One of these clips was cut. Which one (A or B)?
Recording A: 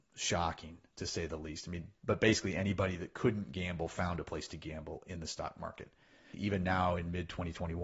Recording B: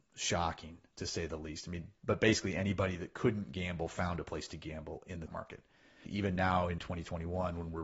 B